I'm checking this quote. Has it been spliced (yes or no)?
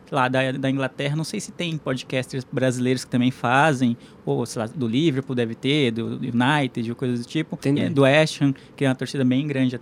yes